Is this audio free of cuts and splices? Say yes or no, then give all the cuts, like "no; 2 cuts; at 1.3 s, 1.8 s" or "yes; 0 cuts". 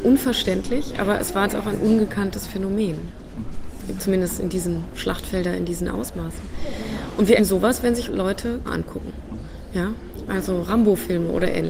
no; 4 cuts; at 1.5 s, 7.4 s, 8.1 s, 8.7 s